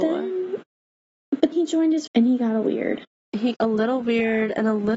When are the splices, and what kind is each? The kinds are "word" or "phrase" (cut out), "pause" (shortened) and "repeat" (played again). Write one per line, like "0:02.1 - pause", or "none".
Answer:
0:01.5 - word
0:02.1 - word
0:02.6 - word
0:03.5 - word